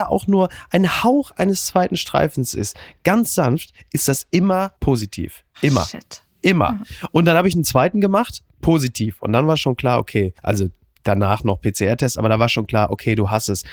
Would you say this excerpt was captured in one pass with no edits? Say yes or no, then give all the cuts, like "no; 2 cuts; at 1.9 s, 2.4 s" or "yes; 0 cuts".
no; 2 cuts; at 4.8 s, 10.4 s